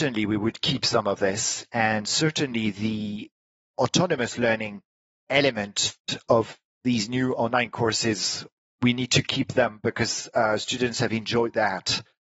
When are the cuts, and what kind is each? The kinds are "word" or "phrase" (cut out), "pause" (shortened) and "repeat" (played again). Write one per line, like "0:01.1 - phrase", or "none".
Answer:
none